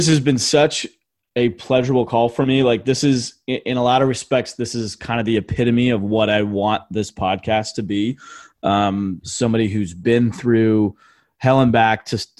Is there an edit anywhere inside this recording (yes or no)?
no